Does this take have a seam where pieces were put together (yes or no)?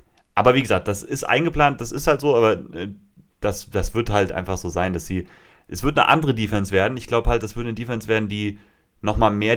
no